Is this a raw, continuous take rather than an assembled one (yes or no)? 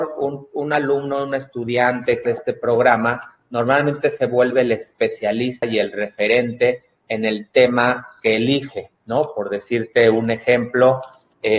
no